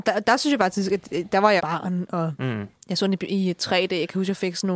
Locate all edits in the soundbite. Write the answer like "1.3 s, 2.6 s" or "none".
1.6 s